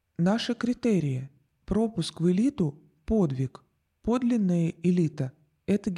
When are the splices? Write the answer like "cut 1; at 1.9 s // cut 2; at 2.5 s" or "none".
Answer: none